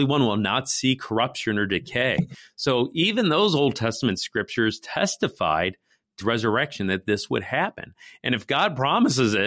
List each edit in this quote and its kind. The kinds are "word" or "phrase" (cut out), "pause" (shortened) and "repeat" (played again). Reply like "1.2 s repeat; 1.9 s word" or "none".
6.2 s word

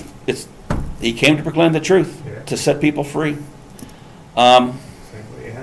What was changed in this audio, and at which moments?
none

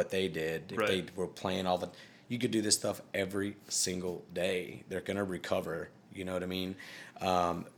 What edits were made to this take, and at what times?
none

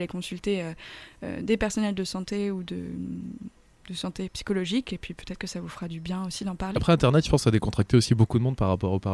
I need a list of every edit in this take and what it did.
none

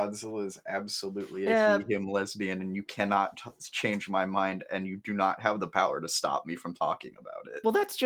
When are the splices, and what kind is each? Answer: none

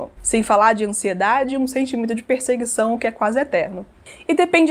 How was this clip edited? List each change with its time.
none

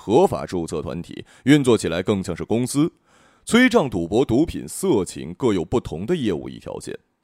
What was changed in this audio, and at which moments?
none

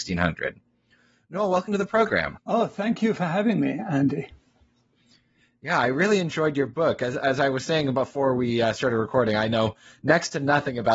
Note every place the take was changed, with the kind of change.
none

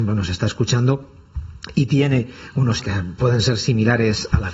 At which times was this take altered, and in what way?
2.8 s word

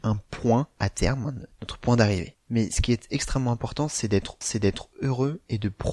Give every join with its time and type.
4.4 s repeat

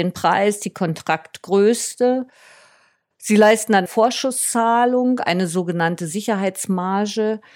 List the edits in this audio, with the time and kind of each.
3.9 s word

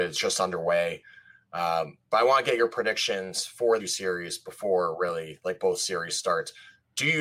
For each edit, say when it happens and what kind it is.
3.8 s phrase

